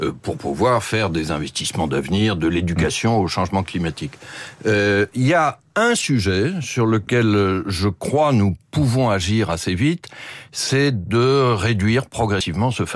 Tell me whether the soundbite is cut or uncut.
uncut